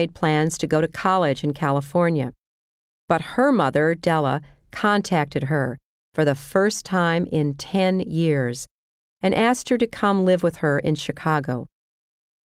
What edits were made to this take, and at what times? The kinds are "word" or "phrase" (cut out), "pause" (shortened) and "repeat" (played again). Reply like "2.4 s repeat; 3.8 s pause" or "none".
none

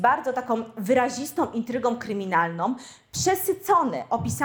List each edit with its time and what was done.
none

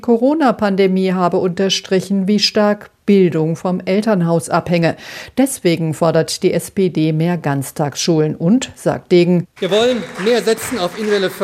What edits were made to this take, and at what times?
none

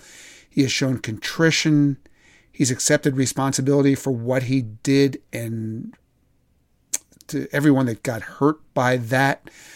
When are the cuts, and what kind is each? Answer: none

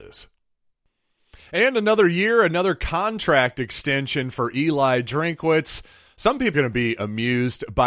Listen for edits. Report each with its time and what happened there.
6.5 s word

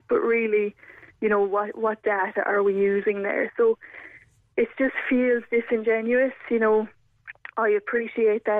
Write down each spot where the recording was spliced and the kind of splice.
none

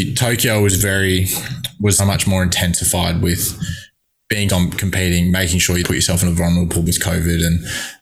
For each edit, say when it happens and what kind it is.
2.0 s word; 4.5 s word; 5.8 s word; 6.9 s word

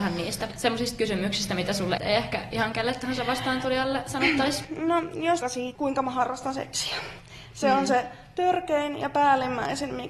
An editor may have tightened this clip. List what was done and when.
2.0 s phrase; 5.4 s phrase; 5.8 s word

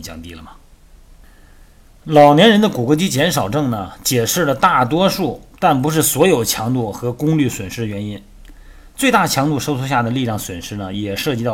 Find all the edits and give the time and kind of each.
none

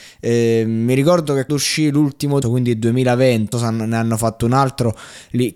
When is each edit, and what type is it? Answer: 1.5 s word; 2.4 s phrase; 3.5 s phrase

